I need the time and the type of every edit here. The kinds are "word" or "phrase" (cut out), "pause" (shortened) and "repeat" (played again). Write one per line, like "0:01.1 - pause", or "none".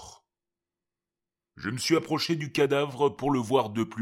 none

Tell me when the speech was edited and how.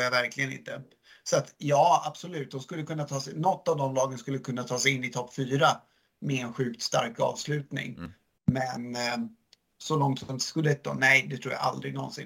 none

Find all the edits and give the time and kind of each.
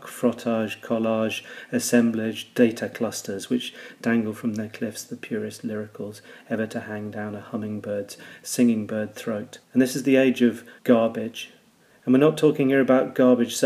0:09.6 - pause
0:10.8 - pause

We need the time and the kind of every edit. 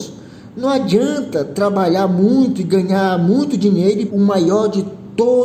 0:04.1 - word

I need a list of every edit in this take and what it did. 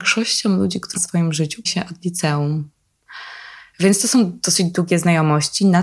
0:01.0 - word
0:01.7 - word

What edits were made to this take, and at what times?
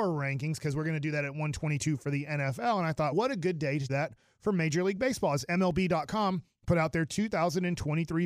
0:03.1 - word
0:03.9 - word

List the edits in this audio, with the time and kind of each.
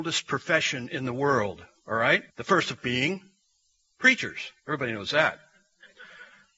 0:02.3 - pause
0:02.8 - word
0:04.6 - pause

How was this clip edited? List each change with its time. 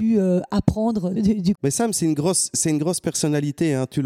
0:01.2 - phrase
0:01.5 - word

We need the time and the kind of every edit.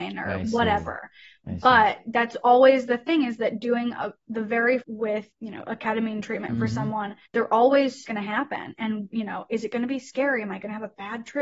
0:04.8 - phrase
0:05.3 - pause
0:07.3 - pause
0:08.0 - phrase

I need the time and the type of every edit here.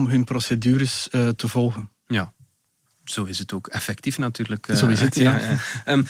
none

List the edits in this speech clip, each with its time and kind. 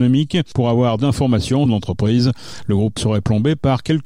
0:01.0 - word
0:01.7 - phrase
0:03.0 - word

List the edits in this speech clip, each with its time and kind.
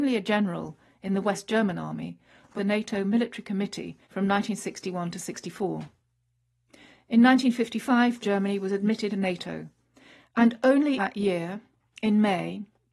0:02.6 - phrase
0:04.0 - pause
0:08.2 - phrase
0:09.1 - word
0:11.0 - word

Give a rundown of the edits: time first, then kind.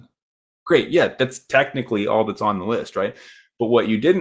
none

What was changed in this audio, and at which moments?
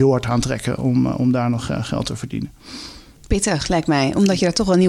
none

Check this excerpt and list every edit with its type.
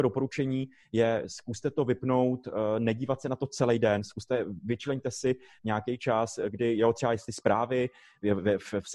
none

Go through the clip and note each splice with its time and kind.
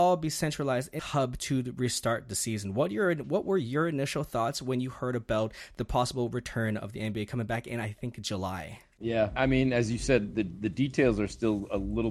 0:01.0 - word
0:09.4 - word

